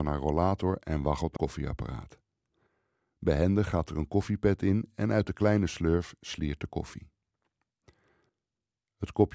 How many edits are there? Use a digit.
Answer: 1